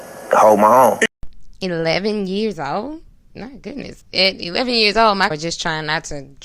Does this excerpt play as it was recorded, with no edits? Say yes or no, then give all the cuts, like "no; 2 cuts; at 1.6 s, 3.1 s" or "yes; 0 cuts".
no; 3 cuts; at 3.1 s, 4.0 s, 5.3 s